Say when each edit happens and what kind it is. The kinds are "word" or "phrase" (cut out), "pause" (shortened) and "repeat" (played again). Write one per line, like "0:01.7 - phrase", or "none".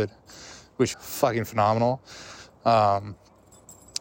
0:00.9 - word